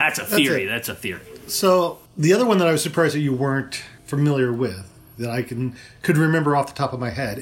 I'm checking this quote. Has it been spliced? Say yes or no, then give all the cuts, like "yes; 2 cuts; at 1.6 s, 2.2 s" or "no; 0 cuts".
yes; 2 cuts; at 2.1 s, 4.0 s